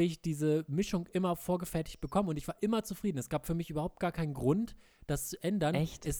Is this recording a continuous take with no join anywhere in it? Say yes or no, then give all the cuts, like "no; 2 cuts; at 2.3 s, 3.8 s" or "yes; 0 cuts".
yes; 0 cuts